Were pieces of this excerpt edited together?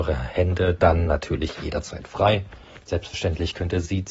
no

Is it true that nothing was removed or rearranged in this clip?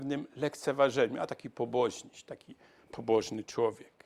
yes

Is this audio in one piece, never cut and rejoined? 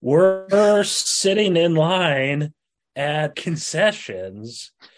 no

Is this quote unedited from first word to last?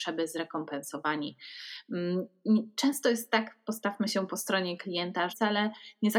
no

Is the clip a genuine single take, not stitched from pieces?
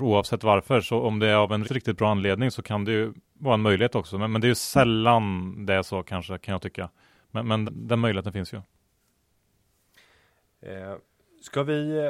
no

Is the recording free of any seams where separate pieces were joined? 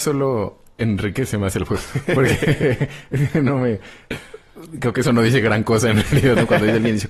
yes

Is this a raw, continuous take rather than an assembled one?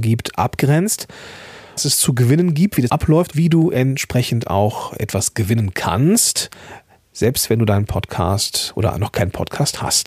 no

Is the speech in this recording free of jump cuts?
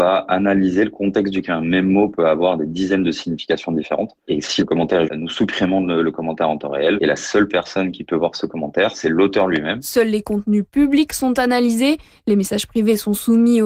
no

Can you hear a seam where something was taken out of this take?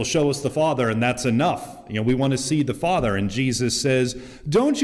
no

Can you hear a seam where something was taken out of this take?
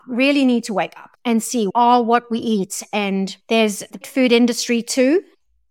yes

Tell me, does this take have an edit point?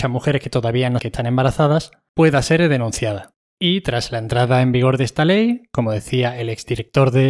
yes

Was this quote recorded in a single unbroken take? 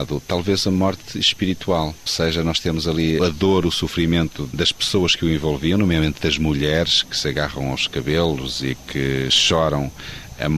no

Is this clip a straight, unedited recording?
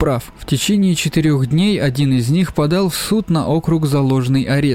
yes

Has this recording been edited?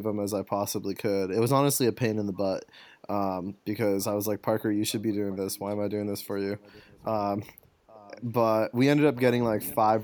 no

